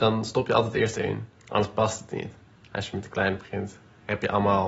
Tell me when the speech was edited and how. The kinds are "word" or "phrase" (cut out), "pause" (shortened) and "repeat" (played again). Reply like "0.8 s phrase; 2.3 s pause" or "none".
1.0 s phrase